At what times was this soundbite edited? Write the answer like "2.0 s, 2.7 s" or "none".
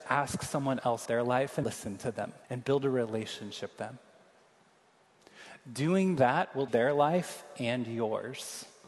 1.1 s, 1.6 s, 2.4 s, 3.7 s, 6.7 s